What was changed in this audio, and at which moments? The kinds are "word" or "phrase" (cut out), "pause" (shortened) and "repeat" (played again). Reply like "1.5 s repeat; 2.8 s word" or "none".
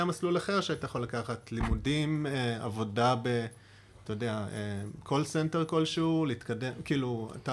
none

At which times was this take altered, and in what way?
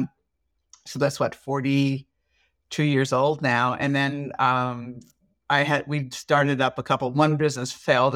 none

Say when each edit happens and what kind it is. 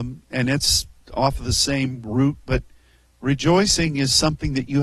none

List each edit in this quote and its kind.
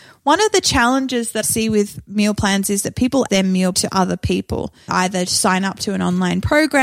1.4 s word; 3.3 s word; 3.7 s word; 4.9 s word

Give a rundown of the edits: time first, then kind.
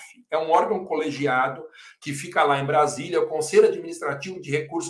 none

